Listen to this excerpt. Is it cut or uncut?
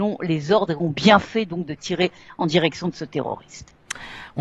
uncut